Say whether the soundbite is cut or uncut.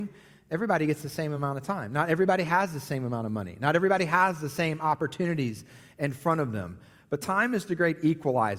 uncut